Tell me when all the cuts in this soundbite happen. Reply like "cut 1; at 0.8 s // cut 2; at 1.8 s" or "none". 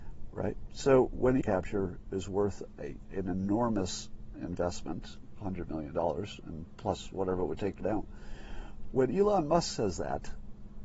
cut 1; at 1.4 s // cut 2; at 7.8 s